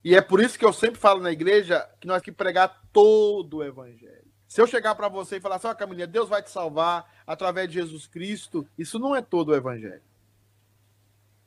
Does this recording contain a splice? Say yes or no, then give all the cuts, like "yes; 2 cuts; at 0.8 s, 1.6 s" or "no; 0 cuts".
yes; 3 cuts; at 2.2 s, 4.4 s, 8.7 s